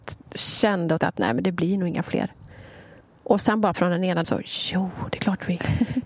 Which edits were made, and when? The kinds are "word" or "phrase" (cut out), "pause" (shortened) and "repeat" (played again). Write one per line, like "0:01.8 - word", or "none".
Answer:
0:01.0 - word
0:03.0 - pause
0:03.7 - word
0:04.2 - phrase